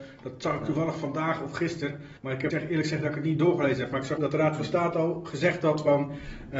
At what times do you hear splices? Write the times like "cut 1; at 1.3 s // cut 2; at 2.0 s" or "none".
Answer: cut 1; at 2.2 s // cut 2; at 2.5 s // cut 3; at 4.2 s